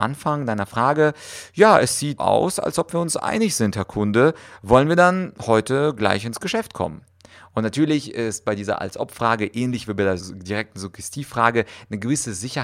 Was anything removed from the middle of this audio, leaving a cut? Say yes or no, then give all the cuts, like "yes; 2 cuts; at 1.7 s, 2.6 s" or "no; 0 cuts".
yes; 2 cuts; at 2.2 s, 10.2 s